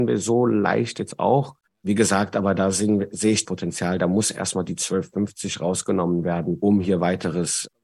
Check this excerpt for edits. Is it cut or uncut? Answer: cut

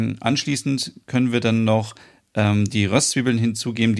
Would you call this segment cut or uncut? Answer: uncut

